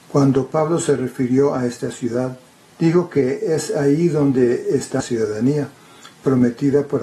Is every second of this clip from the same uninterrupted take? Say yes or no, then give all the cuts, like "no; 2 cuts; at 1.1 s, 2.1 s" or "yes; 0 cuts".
no; 1 cut; at 5.0 s